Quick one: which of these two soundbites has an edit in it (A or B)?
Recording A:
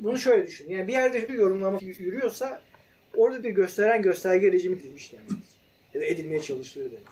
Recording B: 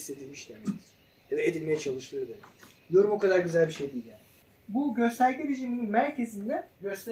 A